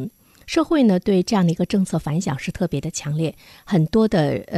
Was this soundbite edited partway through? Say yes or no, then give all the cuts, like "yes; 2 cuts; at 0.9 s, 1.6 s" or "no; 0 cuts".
no; 0 cuts